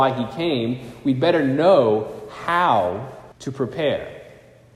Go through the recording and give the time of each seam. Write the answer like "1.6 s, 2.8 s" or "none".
3.3 s